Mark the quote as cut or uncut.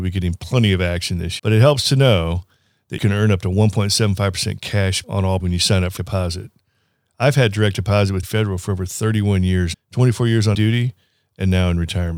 cut